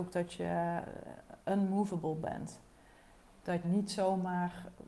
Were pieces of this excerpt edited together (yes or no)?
yes